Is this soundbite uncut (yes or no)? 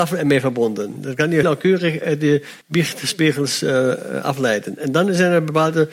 no